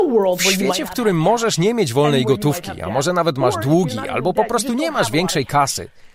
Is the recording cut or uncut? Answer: uncut